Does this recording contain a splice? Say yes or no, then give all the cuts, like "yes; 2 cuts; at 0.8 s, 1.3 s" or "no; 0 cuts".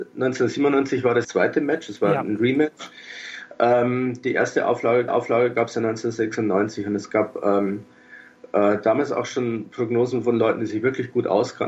yes; 2 cuts; at 1.2 s, 5.1 s